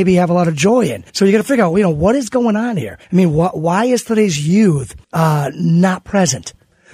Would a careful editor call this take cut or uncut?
cut